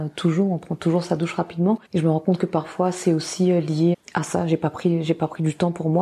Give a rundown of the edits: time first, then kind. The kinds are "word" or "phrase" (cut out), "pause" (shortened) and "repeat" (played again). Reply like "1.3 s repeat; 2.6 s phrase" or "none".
1.8 s pause; 3.9 s word